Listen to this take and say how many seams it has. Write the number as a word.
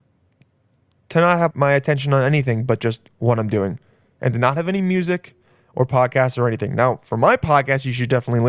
one